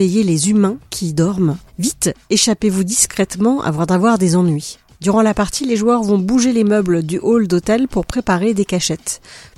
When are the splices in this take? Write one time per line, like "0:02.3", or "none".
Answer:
0:01.7